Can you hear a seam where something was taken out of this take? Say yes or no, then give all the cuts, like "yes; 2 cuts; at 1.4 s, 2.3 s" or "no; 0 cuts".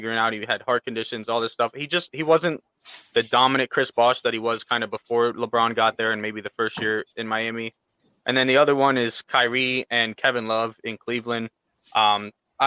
no; 0 cuts